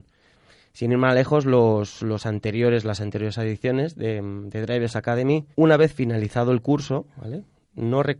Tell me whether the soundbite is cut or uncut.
cut